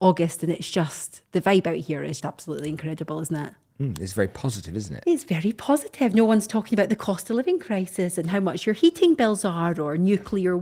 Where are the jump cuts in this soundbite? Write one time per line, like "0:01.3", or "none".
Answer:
0:02.2